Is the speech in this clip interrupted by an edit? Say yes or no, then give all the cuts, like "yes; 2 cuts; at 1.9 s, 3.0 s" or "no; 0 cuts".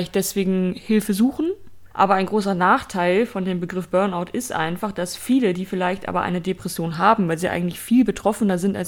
yes; 1 cut; at 1.9 s